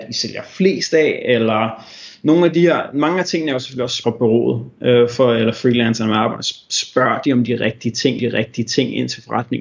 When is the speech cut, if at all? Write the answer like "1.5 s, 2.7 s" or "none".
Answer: 4.0 s, 8.2 s